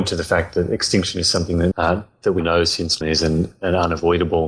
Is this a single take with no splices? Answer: no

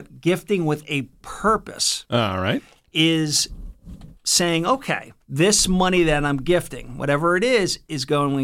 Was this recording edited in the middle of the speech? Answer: yes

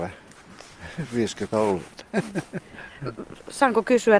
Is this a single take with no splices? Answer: no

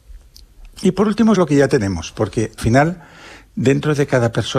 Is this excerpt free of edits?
no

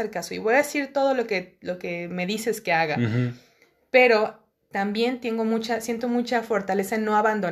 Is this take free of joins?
yes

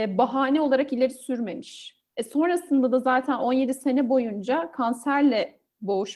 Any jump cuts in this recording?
yes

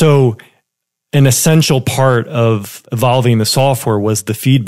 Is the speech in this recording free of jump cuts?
yes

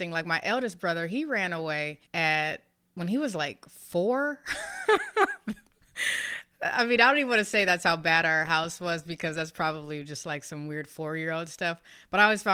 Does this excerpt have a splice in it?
yes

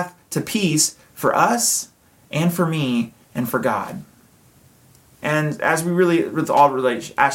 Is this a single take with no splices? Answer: no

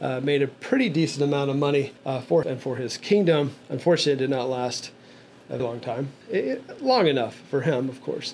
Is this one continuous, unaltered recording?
no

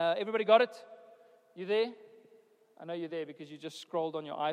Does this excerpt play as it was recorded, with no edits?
yes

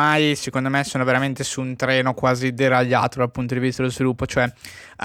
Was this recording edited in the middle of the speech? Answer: no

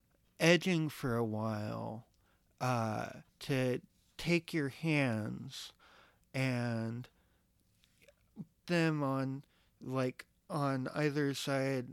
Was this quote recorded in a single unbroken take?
no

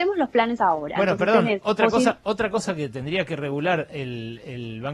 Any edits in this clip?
no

